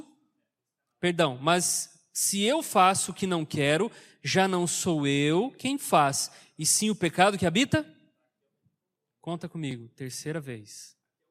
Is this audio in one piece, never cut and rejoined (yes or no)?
yes